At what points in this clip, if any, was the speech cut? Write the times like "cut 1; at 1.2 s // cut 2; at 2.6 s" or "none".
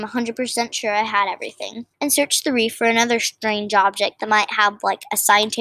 cut 1; at 1.9 s